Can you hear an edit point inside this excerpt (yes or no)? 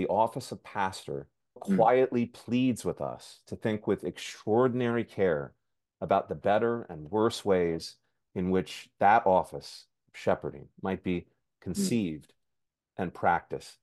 yes